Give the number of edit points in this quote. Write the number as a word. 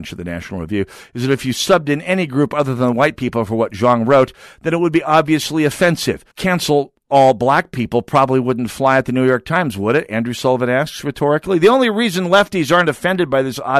one